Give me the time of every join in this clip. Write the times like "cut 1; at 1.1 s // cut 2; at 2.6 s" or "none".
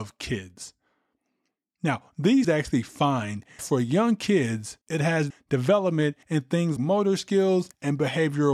cut 1; at 2.4 s // cut 2; at 3.6 s // cut 3; at 4.8 s // cut 4; at 5.3 s // cut 5; at 6.2 s // cut 6; at 6.8 s